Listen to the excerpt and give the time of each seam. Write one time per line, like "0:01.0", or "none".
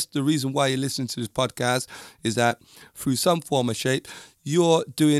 none

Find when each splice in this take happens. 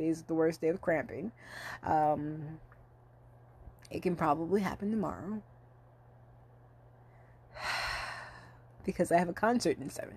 none

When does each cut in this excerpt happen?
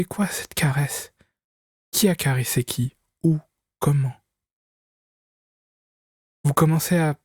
none

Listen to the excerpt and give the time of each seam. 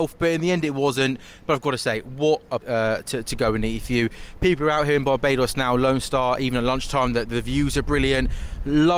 0:02.6

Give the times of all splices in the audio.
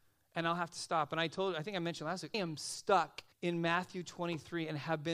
0:02.3
0:03.3

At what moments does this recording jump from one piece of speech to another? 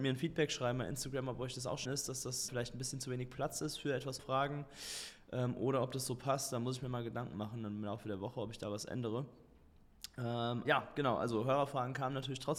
0:01.9
0:02.5
0:04.2
0:10.7

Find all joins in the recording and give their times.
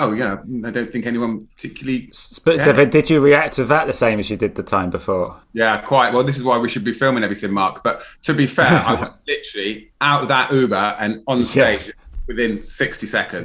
0:05.4
0:09.9

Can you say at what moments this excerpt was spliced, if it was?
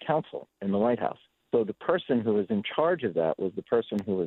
0:01.3

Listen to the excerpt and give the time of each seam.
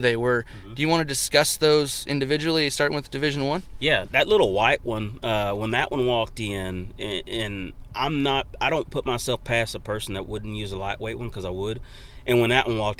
0:04.1

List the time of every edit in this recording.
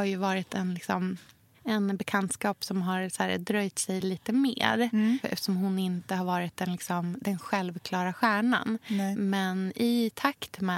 none

